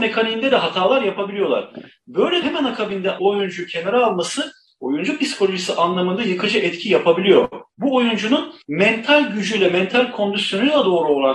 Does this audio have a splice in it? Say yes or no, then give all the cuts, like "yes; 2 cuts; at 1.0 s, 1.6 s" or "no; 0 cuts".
yes; 4 cuts; at 2.4 s, 3.2 s, 7.7 s, 8.6 s